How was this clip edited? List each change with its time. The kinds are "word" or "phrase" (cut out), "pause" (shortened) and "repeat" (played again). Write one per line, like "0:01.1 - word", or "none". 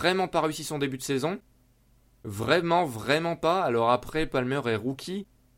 none